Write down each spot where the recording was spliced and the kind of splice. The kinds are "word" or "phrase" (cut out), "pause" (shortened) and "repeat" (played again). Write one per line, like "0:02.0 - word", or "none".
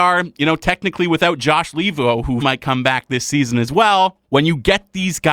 0:02.4 - word
0:04.2 - pause